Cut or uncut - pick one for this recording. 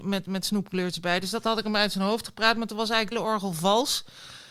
cut